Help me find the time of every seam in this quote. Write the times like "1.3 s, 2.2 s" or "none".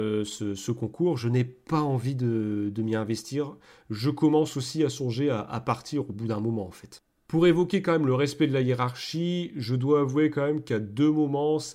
none

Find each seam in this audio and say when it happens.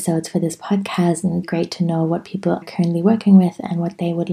1.4 s, 2.6 s

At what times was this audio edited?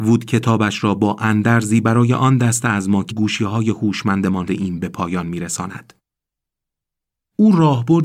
3.1 s, 4.5 s

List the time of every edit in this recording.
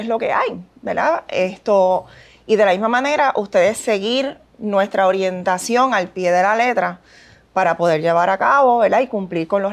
none

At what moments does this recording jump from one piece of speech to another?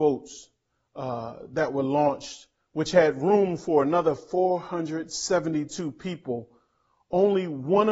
none

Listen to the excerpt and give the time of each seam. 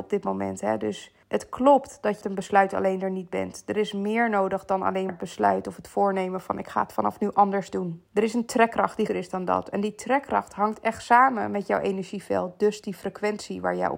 1.2 s, 2.2 s, 5.1 s, 8.1 s, 9.1 s

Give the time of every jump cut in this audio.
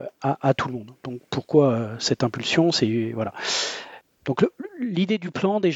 none

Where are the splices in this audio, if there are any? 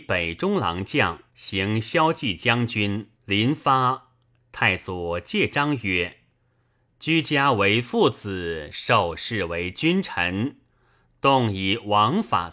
1.3 s, 3.2 s

